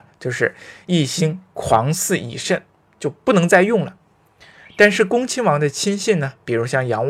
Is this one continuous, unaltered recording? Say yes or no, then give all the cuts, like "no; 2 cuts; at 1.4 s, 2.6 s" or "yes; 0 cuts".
yes; 0 cuts